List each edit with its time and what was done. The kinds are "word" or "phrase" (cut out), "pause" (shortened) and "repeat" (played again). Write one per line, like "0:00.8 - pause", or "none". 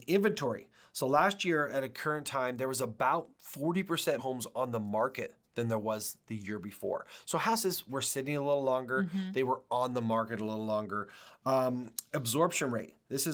0:03.3 - pause
0:04.2 - word